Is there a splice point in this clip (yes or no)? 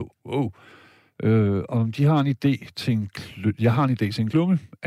no